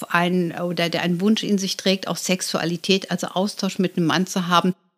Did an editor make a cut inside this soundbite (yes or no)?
no